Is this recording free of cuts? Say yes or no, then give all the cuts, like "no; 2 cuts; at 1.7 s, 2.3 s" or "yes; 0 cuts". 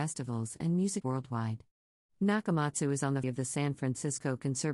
no; 2 cuts; at 1.0 s, 3.2 s